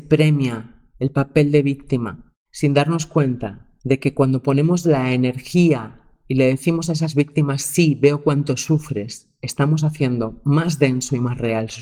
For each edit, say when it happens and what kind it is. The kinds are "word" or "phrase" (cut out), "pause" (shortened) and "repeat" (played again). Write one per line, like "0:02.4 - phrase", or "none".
0:00.9 - pause
0:02.4 - pause
0:03.8 - pause